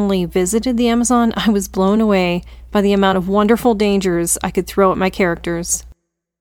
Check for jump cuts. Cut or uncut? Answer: uncut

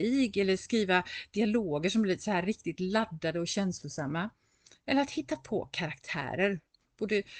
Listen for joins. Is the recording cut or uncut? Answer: uncut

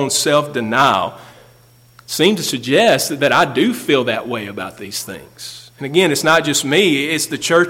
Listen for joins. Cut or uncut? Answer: uncut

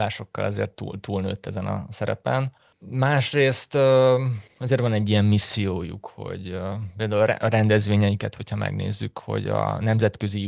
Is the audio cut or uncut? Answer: uncut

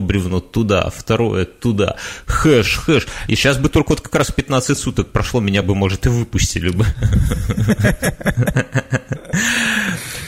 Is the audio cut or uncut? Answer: uncut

